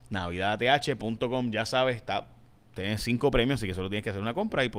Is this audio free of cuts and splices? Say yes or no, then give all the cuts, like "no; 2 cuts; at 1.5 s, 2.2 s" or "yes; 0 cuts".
yes; 0 cuts